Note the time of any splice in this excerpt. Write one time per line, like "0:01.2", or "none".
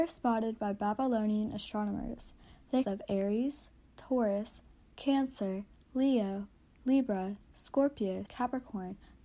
0:02.8
0:04.8
0:06.7
0:08.3

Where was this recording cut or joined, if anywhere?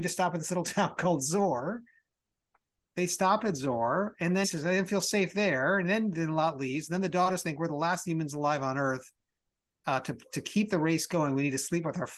0:04.4

